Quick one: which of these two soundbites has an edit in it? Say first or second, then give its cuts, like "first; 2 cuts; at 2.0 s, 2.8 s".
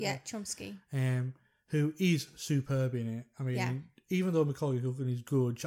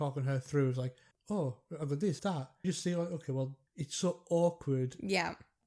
second; 4 cuts; at 1.1 s, 2.2 s, 2.6 s, 3.7 s